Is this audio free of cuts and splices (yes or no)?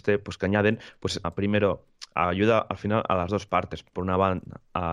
no